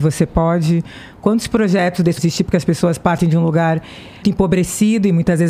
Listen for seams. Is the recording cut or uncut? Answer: cut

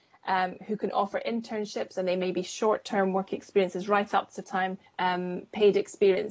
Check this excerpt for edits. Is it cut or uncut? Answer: cut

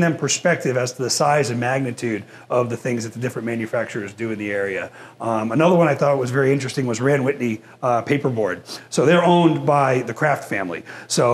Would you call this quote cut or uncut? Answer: uncut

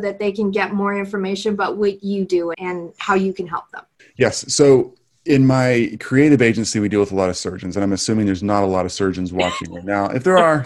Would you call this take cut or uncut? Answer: cut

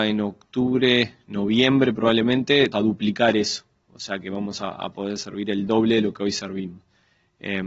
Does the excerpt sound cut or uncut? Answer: cut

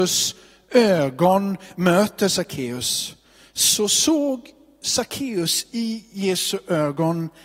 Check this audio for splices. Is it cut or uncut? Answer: uncut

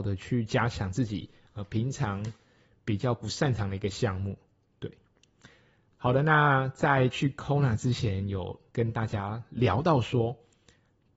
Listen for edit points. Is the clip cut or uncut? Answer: uncut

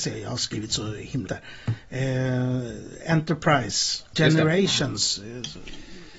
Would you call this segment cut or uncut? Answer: cut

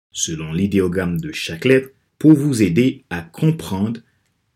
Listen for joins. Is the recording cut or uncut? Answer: cut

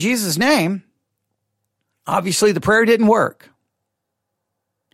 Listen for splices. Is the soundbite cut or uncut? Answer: uncut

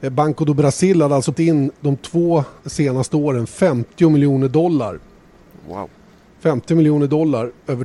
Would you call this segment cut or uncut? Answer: cut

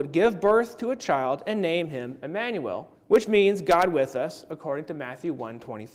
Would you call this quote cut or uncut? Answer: cut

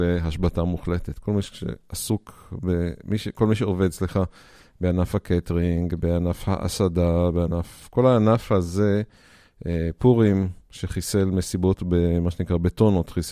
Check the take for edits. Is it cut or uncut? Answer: uncut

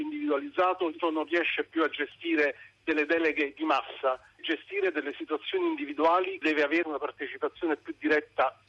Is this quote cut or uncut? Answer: cut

